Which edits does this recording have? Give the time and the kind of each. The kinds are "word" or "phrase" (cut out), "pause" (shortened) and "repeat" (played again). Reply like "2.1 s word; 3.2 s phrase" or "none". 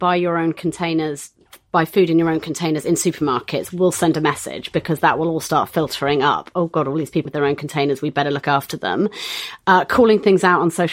7.3 s phrase